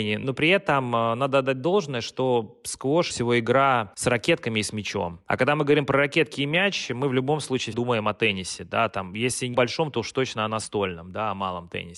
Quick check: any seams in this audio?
yes; 3 cuts; at 3.1 s, 7.7 s, 9.5 s

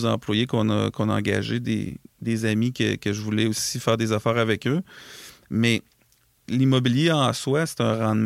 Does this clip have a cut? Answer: no; 0 cuts

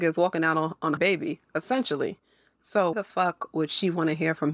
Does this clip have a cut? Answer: yes; 2 cuts; at 1.0 s, 2.9 s

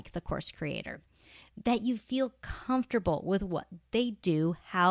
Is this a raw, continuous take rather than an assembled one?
yes; 0 cuts

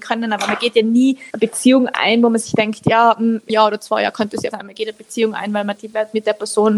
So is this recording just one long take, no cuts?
no; 4 cuts; at 1.3 s, 3.5 s, 4.5 s, 5.8 s

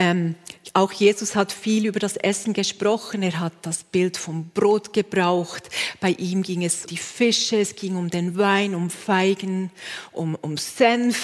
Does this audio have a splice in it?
yes; 1 cut; at 6.9 s

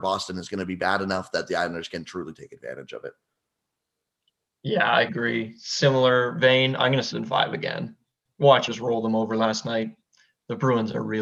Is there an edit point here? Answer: yes; 3 cuts; at 5.1 s, 7.1 s, 8.7 s

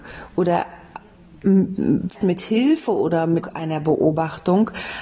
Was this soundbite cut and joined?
yes; 2 cuts; at 2.2 s, 3.4 s

